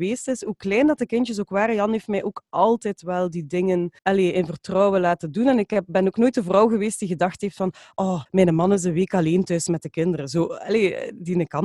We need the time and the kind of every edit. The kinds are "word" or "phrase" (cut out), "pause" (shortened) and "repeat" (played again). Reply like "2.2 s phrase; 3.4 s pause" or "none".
4.0 s pause; 8.3 s pause